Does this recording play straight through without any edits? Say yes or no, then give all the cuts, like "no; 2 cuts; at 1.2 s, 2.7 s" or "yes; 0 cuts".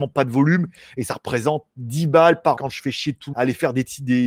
no; 2 cuts; at 2.6 s, 3.3 s